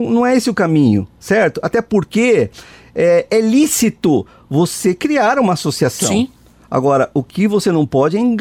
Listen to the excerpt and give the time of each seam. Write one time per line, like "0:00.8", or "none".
none